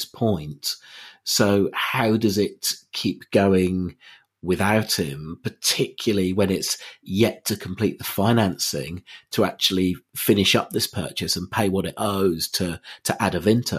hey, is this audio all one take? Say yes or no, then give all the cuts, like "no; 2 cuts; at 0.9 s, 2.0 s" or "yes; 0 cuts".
yes; 0 cuts